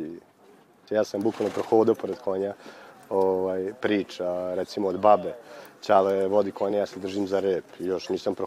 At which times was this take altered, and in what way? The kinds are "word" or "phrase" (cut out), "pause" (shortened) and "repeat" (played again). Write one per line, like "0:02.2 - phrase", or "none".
none